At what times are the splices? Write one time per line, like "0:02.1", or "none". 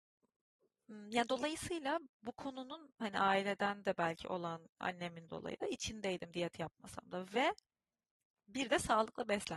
0:02.1
0:05.3

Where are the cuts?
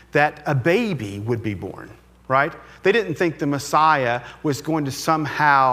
none

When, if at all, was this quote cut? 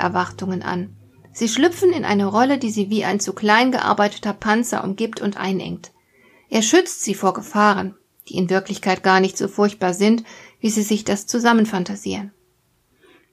none

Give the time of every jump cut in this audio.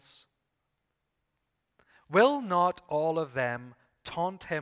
none

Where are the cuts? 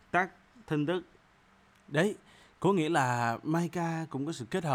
none

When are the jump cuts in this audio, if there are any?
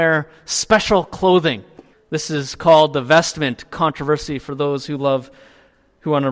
0:01.9

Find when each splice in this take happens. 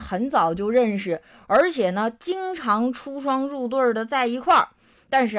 none

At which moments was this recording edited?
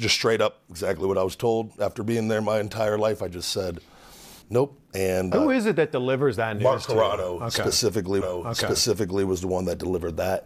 0:04.4
0:05.3
0:08.2

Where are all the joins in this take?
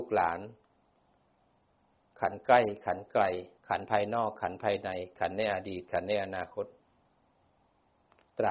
0:03.6

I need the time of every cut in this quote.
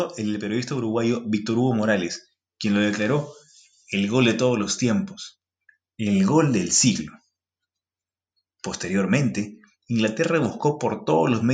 none

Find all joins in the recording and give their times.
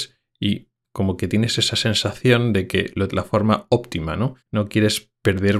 0:03.1
0:04.4

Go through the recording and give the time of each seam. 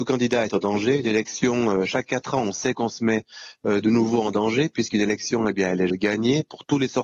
0:05.9

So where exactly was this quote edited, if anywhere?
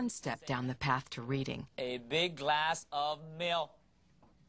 0:01.7

